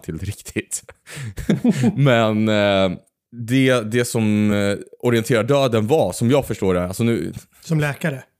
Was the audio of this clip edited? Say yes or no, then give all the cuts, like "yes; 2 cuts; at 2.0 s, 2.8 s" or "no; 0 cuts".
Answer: no; 0 cuts